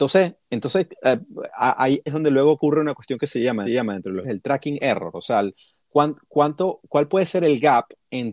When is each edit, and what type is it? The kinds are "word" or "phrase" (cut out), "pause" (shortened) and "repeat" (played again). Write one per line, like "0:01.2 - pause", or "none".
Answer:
0:02.1 - word
0:03.7 - repeat
0:04.2 - word
0:05.8 - pause
0:06.9 - word